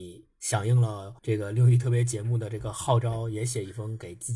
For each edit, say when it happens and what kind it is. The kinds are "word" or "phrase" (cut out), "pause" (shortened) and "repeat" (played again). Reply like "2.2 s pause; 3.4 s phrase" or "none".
1.2 s pause